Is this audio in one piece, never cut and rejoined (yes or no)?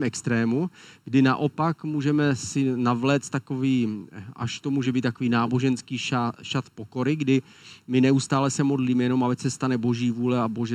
yes